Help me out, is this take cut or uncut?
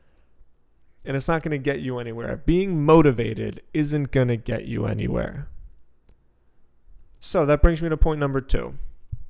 uncut